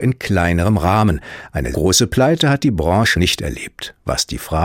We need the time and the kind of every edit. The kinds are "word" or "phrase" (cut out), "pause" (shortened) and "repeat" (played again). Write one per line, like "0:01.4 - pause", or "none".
0:01.7 - word
0:03.1 - word